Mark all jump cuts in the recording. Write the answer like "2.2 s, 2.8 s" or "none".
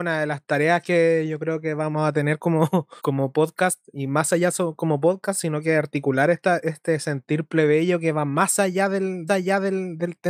3.0 s, 9.3 s

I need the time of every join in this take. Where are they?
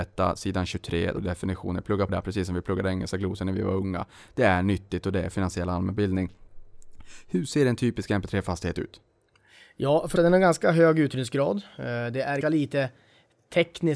1.2 s, 2.1 s, 10.2 s, 12.4 s

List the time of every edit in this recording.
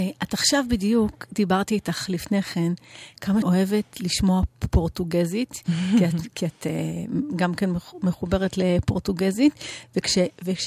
3.4 s, 4.6 s

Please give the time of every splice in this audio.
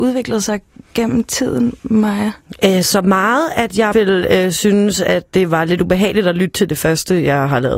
3.9 s

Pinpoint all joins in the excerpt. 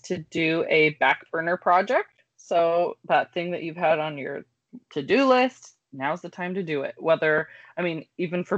none

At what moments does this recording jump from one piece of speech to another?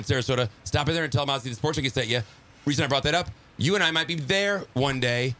none

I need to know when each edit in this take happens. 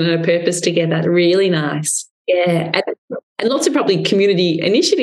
2.2 s, 3.3 s

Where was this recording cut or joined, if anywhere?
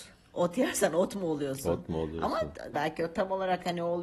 2.7 s

